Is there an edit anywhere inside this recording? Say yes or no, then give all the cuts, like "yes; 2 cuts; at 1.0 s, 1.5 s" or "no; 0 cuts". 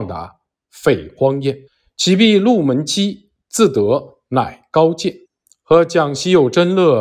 yes; 2 cuts; at 1.7 s, 5.3 s